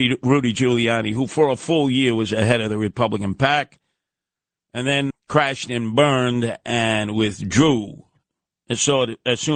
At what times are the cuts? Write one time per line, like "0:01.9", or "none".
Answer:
0:05.1